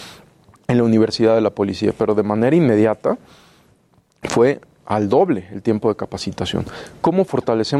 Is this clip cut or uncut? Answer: uncut